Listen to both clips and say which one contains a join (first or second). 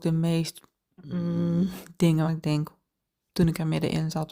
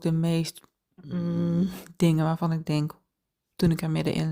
first